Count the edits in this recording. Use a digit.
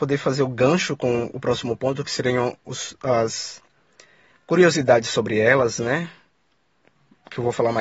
0